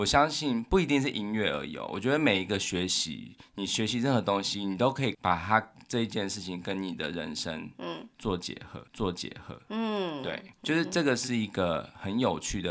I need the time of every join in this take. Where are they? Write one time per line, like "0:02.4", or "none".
0:08.9
0:10.5